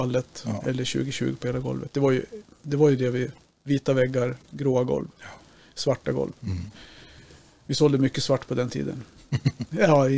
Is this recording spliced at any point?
no; 0 cuts

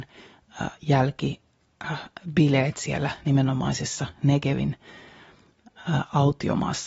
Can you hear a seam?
no; 0 cuts

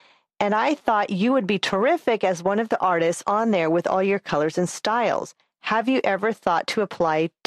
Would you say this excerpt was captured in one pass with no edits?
yes; 0 cuts

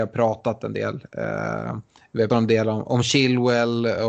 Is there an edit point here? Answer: yes; 2 cuts; at 2.3 s, 2.8 s

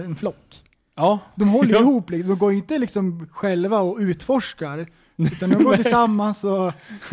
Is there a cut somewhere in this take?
no; 0 cuts

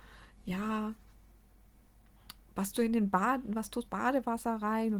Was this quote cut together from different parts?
yes; 2 cuts; at 2.7 s, 3.9 s

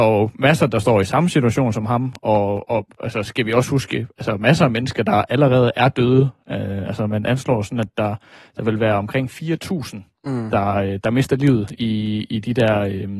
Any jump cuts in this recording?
no; 0 cuts

